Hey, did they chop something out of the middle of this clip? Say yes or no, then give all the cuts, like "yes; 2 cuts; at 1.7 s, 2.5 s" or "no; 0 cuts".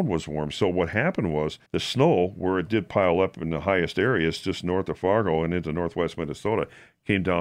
yes; 1 cut; at 1.7 s